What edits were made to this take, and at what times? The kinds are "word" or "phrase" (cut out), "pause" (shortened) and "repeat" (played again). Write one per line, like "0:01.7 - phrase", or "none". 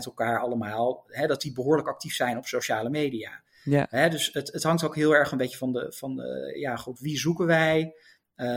none

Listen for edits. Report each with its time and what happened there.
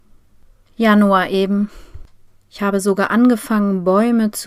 none

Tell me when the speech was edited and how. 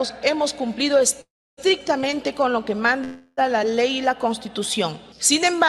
none

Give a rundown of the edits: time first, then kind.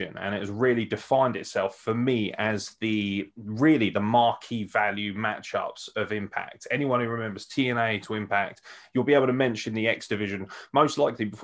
0:03.3 - pause

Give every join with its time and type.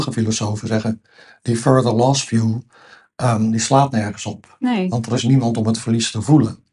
none

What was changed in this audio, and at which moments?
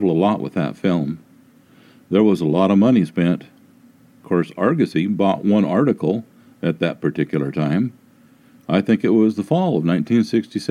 none

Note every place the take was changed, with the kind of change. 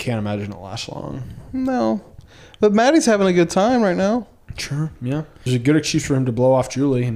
0:05.5 - phrase

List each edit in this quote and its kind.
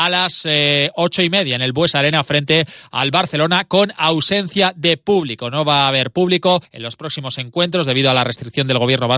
0:06.6 - pause

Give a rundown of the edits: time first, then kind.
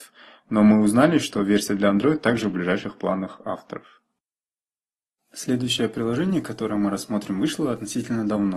none

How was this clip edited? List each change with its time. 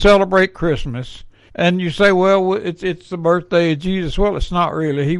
0:01.5 - pause

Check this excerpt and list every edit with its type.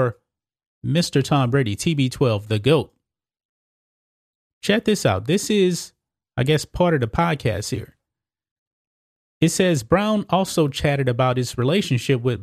none

